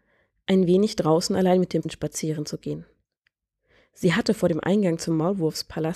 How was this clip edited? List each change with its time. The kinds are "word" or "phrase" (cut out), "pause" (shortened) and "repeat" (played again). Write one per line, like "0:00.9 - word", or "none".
0:01.8 - word